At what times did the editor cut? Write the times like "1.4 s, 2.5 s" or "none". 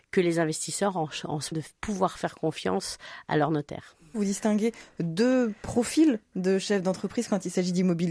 1.5 s

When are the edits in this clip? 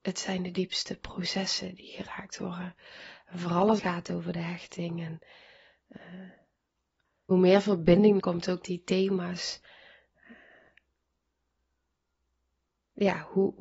3.8 s, 7.3 s, 8.2 s, 8.6 s

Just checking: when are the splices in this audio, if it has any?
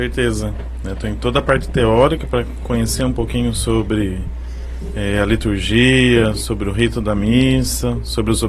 none

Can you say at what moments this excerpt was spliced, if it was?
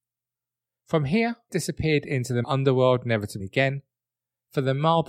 1.5 s, 2.4 s, 3.4 s

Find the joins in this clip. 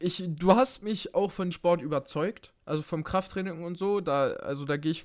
1.1 s, 1.5 s, 2.6 s

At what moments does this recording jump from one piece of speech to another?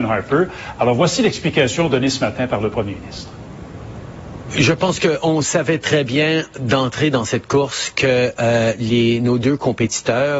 none

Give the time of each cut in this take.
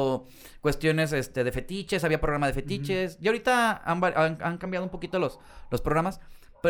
none

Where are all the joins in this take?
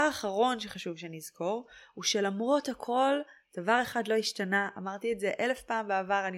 none

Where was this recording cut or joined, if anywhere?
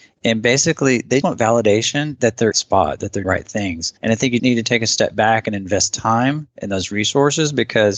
1.2 s, 2.5 s, 3.2 s, 4.0 s, 4.4 s

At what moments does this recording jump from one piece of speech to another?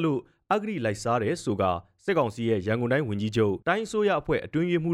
3.6 s

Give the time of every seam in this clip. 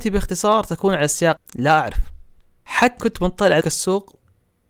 1.4 s, 3.0 s, 3.6 s

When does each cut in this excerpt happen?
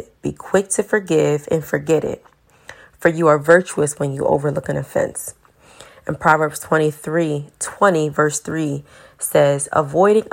none

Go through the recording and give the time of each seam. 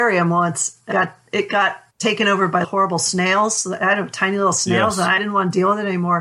0.9 s, 1.9 s, 2.6 s, 5.2 s

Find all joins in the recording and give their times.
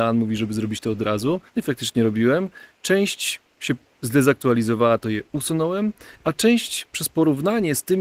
1.5 s, 6.1 s

